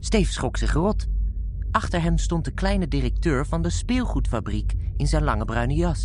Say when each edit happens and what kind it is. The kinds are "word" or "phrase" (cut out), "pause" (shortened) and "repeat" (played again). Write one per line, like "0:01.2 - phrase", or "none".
none